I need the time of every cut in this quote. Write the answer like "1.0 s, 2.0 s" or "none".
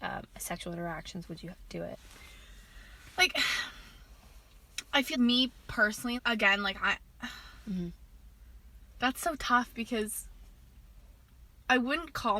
5.1 s, 6.2 s